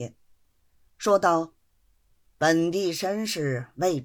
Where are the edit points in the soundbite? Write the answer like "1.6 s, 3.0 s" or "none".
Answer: 1.6 s